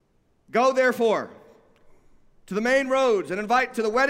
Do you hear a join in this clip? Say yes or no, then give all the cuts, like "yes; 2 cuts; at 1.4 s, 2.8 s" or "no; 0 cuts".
no; 0 cuts